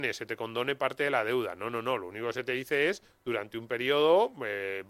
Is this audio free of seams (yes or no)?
yes